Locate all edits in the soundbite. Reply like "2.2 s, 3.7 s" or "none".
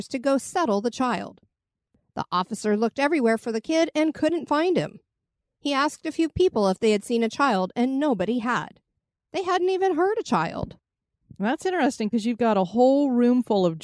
none

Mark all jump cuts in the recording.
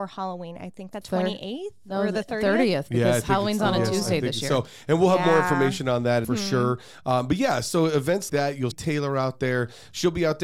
1.0 s, 6.2 s, 8.3 s, 8.7 s

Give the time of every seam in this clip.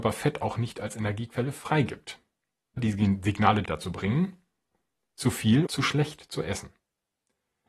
2.8 s, 3.6 s, 5.7 s

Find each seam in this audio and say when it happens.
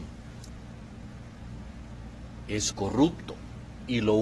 2.7 s

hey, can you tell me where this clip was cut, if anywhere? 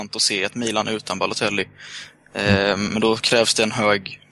none

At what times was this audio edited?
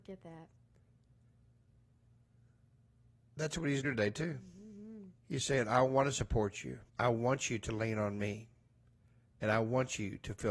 3.8 s, 5.2 s, 6.9 s

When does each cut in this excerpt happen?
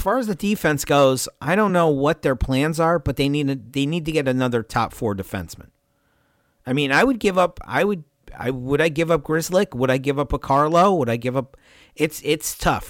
none

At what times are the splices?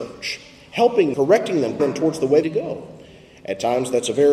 1.1 s, 1.8 s, 2.4 s

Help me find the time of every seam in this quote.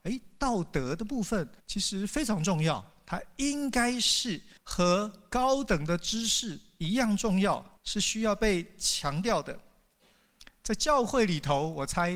1.6 s, 4.6 s, 7.8 s

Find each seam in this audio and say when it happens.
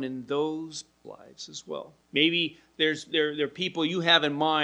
1.0 s, 2.0 s

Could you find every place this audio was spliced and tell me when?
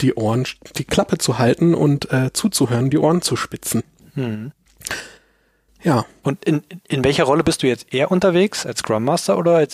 none

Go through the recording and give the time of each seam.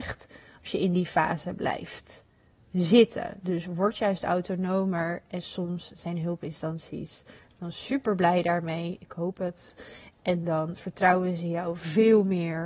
none

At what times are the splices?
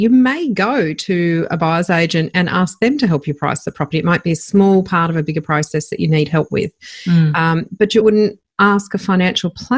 8.0 s

